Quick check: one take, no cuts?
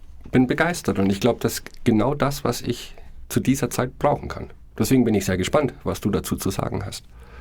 yes; 0 cuts

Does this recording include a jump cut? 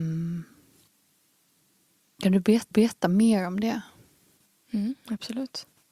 yes; 1 cut; at 2.7 s

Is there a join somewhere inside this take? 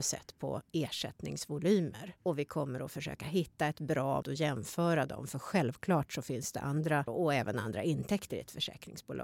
yes; 2 cuts; at 4.2 s, 7.1 s

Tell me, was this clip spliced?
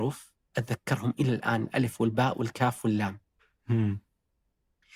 no; 0 cuts

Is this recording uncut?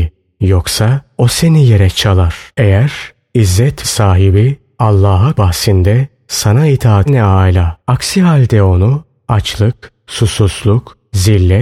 no; 5 cuts; at 2.5 s, 3.8 s, 5.3 s, 7.1 s, 7.8 s

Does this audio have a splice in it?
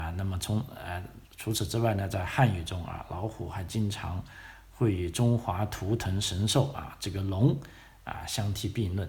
yes; 1 cut; at 1.2 s

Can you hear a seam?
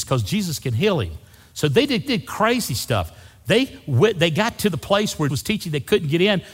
yes; 2 cuts; at 2.1 s, 5.3 s

